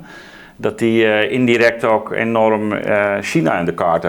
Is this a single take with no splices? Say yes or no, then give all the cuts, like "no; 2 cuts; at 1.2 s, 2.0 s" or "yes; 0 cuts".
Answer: yes; 0 cuts